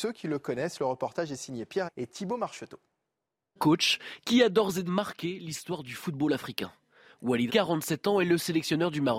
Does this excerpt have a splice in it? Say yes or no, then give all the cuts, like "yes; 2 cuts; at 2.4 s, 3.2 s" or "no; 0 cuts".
yes; 4 cuts; at 1.9 s, 3.6 s, 4.9 s, 7.5 s